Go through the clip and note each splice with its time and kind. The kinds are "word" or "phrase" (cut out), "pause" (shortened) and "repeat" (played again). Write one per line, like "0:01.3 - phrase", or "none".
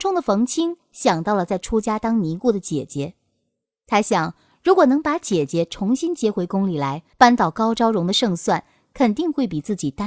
0:07.1 - pause